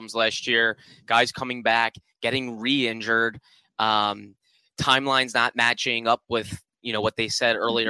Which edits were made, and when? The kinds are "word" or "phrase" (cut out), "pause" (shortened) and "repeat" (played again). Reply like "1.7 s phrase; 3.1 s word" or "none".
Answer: none